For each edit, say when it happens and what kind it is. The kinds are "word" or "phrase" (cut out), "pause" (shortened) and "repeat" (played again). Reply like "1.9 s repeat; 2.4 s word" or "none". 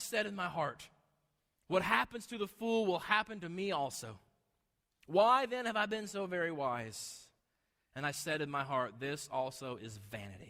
none